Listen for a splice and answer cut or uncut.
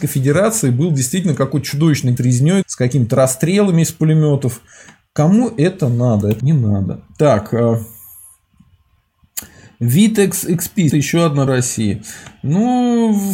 cut